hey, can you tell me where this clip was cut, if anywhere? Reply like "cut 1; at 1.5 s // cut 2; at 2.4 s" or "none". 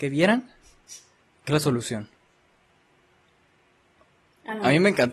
cut 1; at 1.5 s